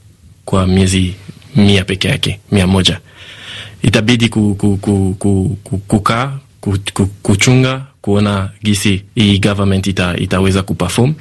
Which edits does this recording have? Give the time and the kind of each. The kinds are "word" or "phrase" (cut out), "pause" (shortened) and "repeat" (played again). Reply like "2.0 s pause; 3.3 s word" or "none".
9.1 s pause